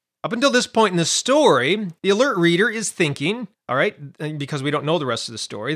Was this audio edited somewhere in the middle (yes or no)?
yes